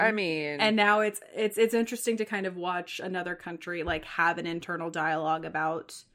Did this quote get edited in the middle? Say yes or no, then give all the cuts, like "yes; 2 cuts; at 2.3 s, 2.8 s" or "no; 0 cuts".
no; 0 cuts